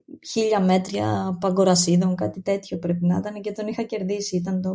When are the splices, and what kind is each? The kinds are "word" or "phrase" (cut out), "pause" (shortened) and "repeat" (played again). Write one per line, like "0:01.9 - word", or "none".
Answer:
none